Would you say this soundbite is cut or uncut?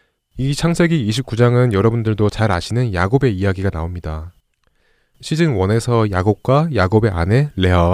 uncut